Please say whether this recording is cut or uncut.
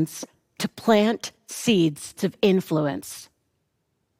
cut